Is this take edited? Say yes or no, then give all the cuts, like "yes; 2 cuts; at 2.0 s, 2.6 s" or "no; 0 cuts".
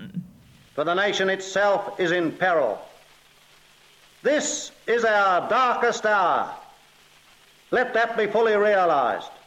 no; 0 cuts